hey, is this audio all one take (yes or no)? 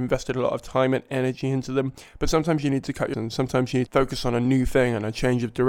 no